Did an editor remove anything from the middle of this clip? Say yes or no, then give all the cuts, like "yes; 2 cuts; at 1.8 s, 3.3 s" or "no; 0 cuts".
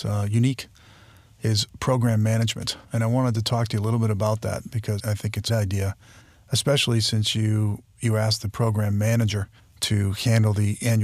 yes; 5 cuts; at 2.8 s, 5.0 s, 5.5 s, 6.2 s, 9.6 s